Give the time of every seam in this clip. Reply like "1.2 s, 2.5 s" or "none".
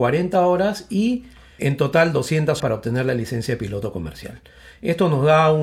1.6 s, 2.6 s